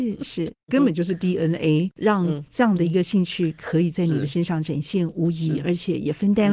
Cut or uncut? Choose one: uncut